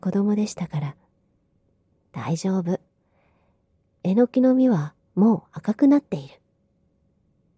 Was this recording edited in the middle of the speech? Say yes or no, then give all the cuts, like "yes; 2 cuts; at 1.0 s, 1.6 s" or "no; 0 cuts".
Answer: no; 0 cuts